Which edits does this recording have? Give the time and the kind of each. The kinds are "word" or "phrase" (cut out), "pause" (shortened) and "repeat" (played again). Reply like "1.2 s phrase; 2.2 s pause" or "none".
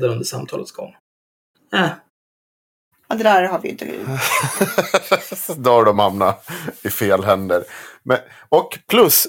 none